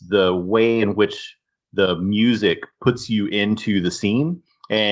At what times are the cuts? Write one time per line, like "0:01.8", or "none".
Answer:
none